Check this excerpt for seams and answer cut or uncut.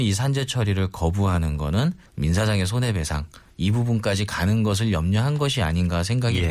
cut